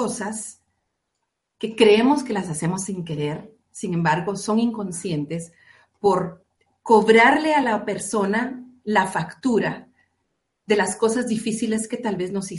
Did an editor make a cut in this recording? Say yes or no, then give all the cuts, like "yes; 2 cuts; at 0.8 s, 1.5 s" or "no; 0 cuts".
no; 0 cuts